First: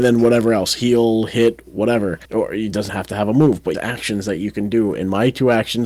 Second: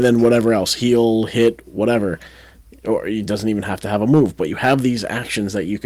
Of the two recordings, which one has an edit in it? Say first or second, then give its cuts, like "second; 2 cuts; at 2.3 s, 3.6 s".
first; 3 cuts; at 2.2 s, 2.9 s, 3.7 s